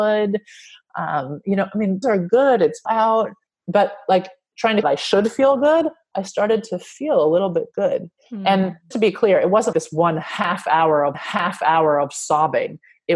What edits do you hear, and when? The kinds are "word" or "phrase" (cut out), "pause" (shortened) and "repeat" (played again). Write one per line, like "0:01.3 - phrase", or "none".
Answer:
0:02.0 - word
0:02.9 - word
0:03.5 - pause
0:04.8 - phrase
0:08.2 - pause
0:08.9 - word
0:09.7 - word
0:11.1 - repeat